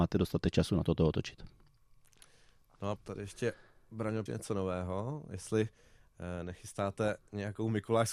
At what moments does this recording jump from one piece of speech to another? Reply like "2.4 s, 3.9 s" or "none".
3.0 s, 4.3 s